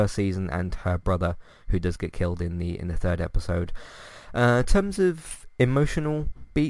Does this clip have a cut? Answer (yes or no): no